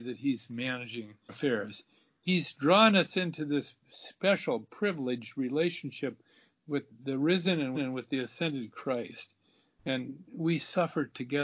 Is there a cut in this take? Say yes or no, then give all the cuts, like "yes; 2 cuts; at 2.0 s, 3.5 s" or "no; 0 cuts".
yes; 2 cuts; at 1.3 s, 7.7 s